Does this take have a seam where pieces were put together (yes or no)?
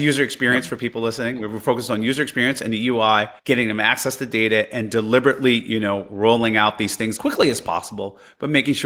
yes